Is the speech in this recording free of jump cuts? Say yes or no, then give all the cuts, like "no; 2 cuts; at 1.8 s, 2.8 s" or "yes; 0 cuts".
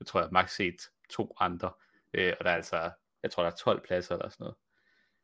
yes; 0 cuts